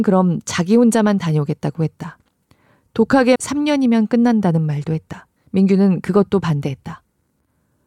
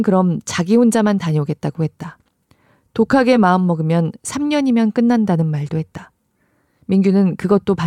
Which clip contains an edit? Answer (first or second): first